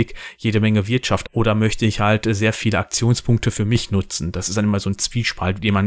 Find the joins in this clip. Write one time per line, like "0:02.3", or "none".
0:01.2